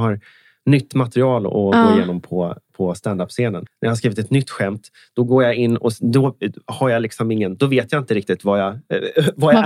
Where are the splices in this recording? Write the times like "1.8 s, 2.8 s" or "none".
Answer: none